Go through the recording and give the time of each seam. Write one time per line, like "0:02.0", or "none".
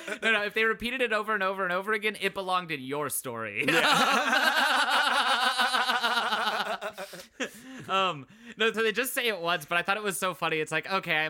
0:08.7